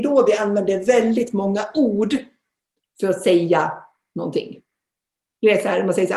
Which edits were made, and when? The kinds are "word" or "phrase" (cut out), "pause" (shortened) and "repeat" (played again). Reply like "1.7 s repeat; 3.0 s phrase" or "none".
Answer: none